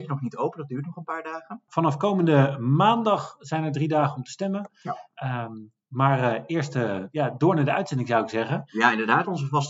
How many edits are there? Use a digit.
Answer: 0